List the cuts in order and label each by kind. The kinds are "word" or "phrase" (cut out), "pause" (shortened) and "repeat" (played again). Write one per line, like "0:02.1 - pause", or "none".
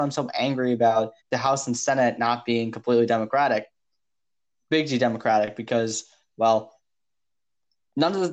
0:01.2 - pause